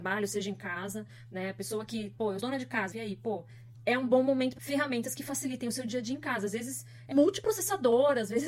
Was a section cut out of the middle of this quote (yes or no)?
yes